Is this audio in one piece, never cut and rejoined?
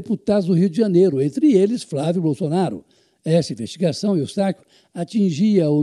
yes; 0 cuts

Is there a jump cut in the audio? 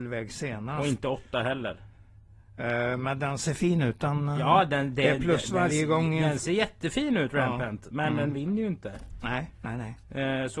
no; 0 cuts

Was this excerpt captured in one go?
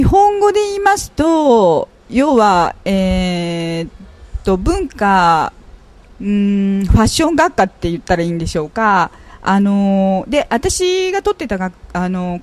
yes; 0 cuts

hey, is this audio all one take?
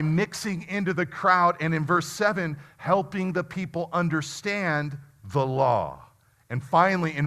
yes; 0 cuts

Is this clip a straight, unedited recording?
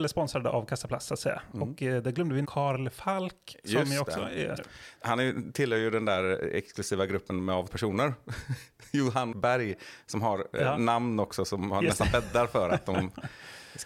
no; 5 cuts; at 2.4 s, 4.6 s, 5.0 s, 7.7 s, 9.3 s

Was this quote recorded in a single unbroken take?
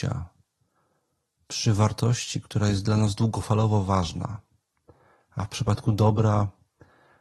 yes; 0 cuts

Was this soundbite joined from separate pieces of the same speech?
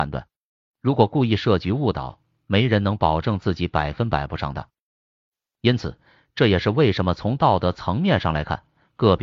no; 0 cuts

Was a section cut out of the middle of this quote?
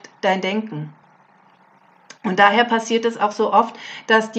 no; 0 cuts

